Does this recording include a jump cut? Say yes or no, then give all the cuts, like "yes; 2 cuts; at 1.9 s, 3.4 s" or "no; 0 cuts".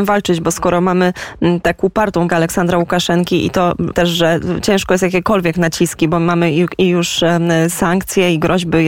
yes; 2 cuts; at 2.3 s, 3.9 s